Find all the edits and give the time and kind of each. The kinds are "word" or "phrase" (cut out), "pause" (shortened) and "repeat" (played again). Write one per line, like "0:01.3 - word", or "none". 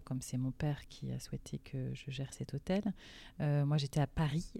none